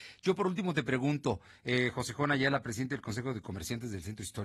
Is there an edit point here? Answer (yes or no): no